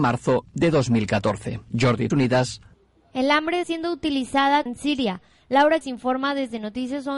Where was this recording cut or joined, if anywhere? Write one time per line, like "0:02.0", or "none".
0:02.1
0:03.6
0:04.7
0:05.8